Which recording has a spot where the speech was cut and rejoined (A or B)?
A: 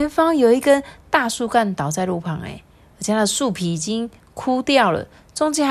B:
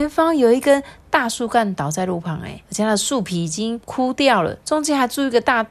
B